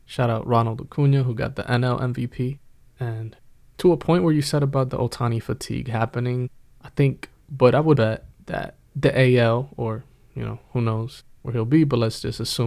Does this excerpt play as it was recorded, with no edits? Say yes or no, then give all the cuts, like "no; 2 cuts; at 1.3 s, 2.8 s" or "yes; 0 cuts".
no; 2 cuts; at 7.3 s, 8.0 s